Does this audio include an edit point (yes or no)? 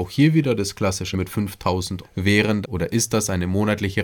yes